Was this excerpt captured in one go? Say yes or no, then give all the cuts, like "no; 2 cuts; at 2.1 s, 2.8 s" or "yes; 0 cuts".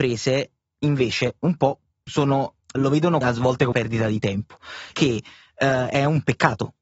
no; 4 cuts; at 2.7 s, 3.2 s, 3.7 s, 4.9 s